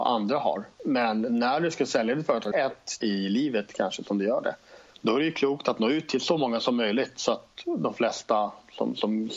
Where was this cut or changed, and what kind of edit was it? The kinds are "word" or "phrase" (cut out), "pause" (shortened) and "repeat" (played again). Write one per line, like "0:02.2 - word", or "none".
0:02.5 - word
0:03.0 - word
0:04.9 - pause